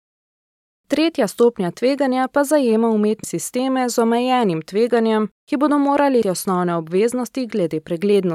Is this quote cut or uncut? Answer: cut